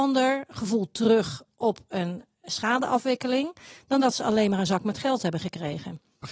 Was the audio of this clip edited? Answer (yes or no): no